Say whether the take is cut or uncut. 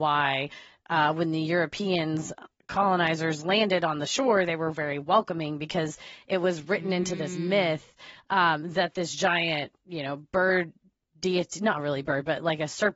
uncut